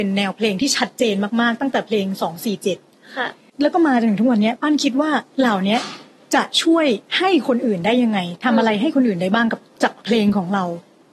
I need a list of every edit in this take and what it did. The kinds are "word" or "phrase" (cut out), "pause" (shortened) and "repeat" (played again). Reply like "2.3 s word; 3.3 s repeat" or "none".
5.3 s pause; 7.0 s pause; 10.0 s pause